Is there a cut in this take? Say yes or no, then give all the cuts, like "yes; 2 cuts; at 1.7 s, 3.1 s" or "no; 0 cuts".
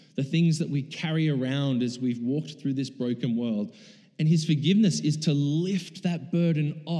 no; 0 cuts